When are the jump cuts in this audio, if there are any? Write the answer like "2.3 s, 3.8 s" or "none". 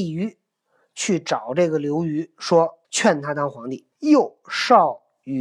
2.8 s, 3.9 s